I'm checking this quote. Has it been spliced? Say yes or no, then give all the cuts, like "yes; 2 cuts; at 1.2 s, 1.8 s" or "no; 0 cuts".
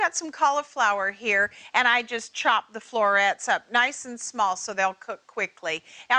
no; 0 cuts